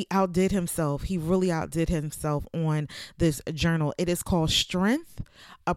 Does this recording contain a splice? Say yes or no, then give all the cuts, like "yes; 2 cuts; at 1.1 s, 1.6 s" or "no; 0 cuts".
no; 0 cuts